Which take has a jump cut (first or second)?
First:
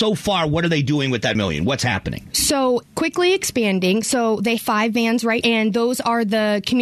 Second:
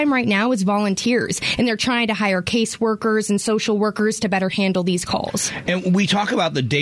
first